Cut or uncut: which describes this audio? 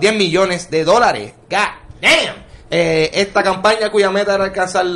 cut